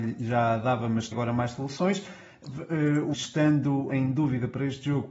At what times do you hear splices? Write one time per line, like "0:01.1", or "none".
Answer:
0:01.1
0:03.1
0:03.9